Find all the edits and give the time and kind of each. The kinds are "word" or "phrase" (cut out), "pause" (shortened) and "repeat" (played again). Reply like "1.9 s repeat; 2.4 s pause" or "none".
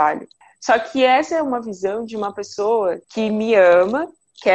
3.0 s pause